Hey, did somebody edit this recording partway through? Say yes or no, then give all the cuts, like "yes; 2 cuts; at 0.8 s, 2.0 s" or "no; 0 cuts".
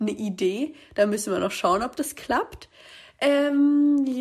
no; 0 cuts